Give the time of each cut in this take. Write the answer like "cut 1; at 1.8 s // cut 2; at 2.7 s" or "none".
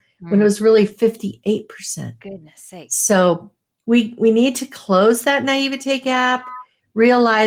none